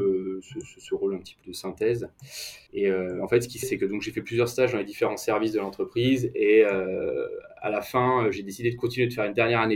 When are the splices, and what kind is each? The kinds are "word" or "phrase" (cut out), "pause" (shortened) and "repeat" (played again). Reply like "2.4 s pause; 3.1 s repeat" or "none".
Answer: 1.4 s word; 2.7 s pause; 3.6 s word